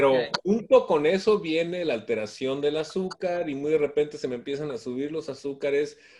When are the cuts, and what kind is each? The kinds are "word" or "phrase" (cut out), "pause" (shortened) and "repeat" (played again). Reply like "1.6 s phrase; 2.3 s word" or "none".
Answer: none